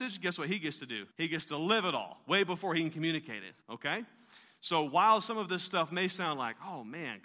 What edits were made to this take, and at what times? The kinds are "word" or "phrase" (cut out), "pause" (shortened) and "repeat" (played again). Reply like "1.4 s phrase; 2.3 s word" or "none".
1.1 s pause; 3.6 s pause